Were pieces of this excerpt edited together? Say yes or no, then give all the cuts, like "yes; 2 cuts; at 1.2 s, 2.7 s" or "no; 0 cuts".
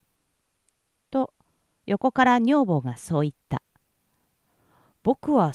no; 0 cuts